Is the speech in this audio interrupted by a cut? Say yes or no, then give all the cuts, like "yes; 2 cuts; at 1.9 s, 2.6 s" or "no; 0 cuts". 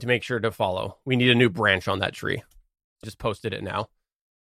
yes; 1 cut; at 3.0 s